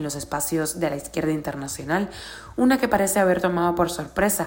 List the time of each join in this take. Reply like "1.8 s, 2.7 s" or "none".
none